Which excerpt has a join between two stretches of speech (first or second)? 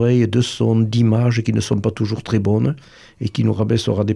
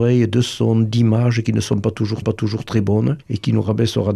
second